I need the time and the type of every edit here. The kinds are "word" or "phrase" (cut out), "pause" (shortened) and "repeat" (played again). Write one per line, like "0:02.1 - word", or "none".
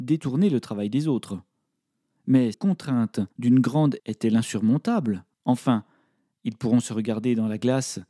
0:02.5 - word
0:03.3 - pause
0:04.0 - word
0:05.3 - pause